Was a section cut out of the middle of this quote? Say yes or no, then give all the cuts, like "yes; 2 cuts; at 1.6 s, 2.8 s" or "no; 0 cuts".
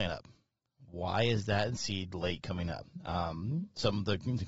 no; 0 cuts